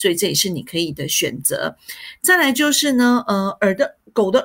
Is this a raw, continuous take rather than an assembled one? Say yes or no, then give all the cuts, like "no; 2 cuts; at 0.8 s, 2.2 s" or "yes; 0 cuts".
yes; 0 cuts